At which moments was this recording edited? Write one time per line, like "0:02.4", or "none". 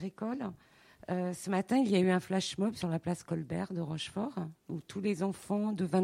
none